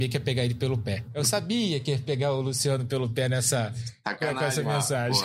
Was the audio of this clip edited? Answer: no; 0 cuts

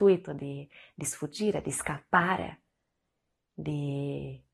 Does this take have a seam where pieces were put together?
no; 0 cuts

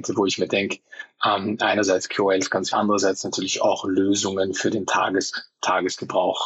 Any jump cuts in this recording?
yes; 1 cut; at 2.7 s

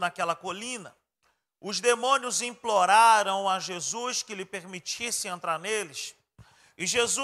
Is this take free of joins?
yes; 0 cuts

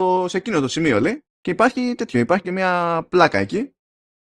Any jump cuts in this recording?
yes; 2 cuts; at 1.3 s, 2.4 s

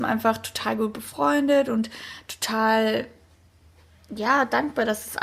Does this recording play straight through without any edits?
yes; 0 cuts

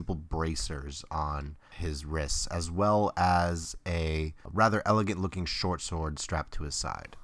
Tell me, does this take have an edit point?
no; 0 cuts

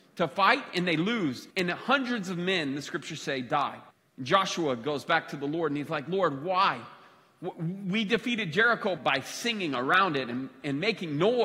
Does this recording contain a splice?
yes; 3 cuts; at 1.5 s, 3.9 s, 9.0 s

